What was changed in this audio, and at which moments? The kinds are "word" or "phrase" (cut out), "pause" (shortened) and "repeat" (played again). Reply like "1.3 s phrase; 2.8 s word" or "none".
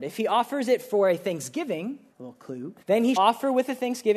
2.1 s pause; 2.8 s pause; 3.2 s word